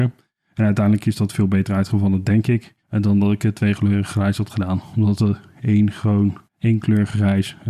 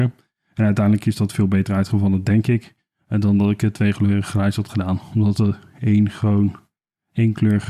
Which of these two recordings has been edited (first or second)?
first